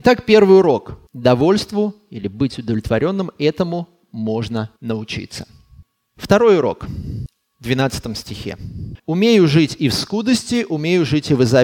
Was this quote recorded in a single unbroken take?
no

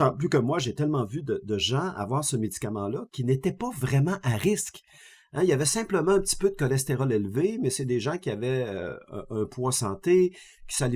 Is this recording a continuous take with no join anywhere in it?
yes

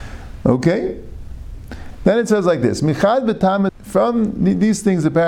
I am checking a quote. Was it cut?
yes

